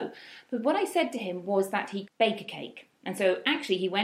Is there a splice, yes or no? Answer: yes